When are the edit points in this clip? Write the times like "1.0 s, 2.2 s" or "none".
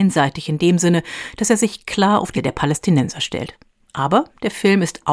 2.4 s